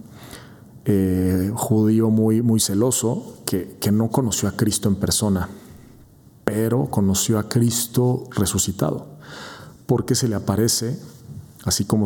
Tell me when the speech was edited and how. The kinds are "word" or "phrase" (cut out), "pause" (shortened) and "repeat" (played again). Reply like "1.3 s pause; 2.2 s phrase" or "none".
none